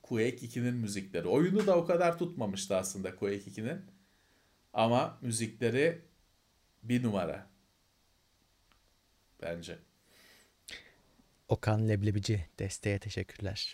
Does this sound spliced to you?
no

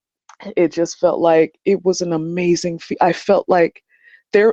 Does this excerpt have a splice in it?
no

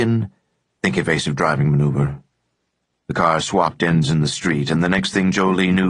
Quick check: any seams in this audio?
no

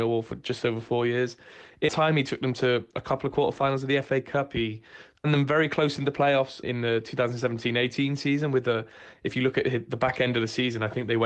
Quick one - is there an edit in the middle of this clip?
yes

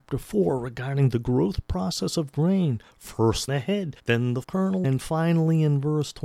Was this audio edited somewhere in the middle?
yes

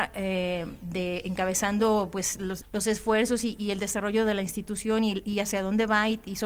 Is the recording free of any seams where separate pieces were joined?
yes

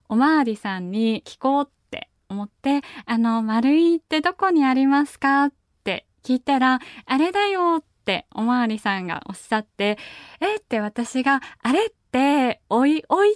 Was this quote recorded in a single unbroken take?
no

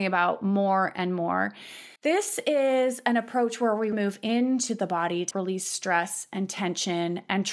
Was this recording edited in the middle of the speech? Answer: yes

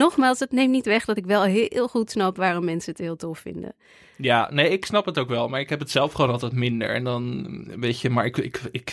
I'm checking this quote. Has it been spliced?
no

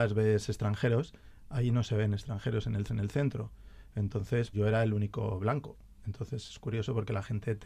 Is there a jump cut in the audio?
yes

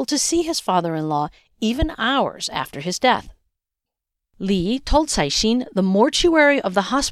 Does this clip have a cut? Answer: no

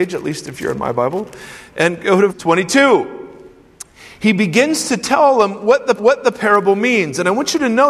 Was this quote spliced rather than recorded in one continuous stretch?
yes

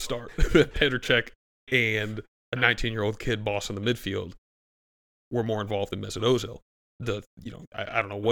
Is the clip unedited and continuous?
yes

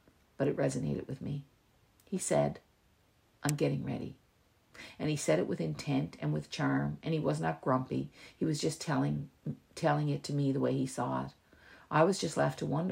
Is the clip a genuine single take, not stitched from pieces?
yes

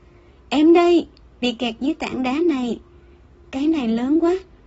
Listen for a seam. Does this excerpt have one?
yes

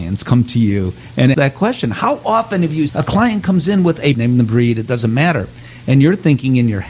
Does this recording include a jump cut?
yes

